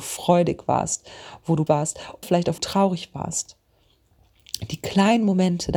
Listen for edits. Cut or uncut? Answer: cut